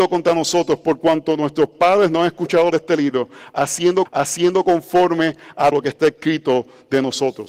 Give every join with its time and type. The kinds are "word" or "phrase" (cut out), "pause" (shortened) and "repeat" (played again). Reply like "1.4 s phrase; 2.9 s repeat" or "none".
2.7 s phrase; 4.0 s repeat; 5.7 s word